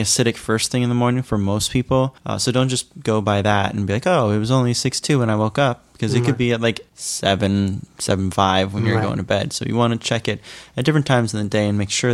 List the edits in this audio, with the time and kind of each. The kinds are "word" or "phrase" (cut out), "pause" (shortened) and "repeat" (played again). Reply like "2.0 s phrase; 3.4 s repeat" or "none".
2.2 s pause; 6.9 s pause